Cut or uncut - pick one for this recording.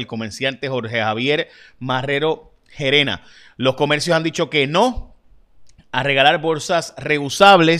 uncut